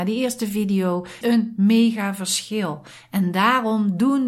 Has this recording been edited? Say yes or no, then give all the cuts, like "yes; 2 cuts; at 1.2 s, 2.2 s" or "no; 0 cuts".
yes; 1 cut; at 1.2 s